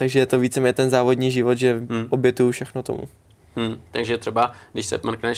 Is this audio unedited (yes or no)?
yes